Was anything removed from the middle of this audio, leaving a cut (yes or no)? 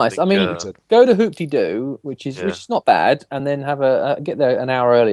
no